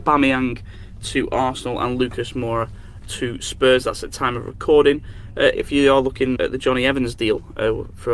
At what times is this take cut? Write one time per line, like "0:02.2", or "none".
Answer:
0:03.0
0:05.5
0:06.4